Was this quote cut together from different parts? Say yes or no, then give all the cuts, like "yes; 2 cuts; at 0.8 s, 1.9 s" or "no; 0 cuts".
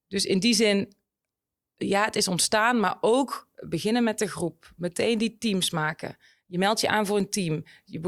no; 0 cuts